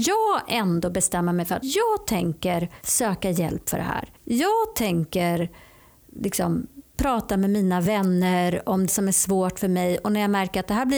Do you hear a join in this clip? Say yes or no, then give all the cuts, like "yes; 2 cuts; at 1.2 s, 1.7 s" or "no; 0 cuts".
yes; 4 cuts; at 1.6 s, 2.8 s, 4.2 s, 8.9 s